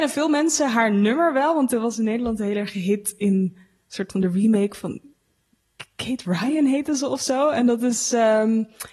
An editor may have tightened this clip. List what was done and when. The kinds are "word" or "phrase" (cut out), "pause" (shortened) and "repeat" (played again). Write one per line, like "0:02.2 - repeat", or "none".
none